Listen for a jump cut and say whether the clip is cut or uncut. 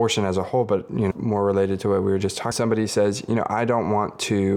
cut